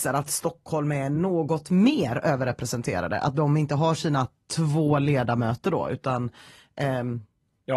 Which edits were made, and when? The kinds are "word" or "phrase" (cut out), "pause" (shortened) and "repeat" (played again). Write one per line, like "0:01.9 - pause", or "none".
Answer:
none